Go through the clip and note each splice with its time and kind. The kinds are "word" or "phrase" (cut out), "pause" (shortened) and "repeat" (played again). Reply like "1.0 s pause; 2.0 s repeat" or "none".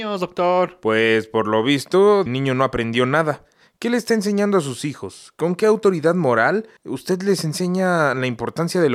2.3 s word; 6.8 s pause